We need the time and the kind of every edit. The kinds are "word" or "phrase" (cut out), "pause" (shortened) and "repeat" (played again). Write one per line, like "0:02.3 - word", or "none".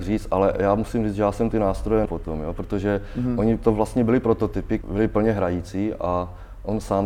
0:02.1 - word
0:04.8 - word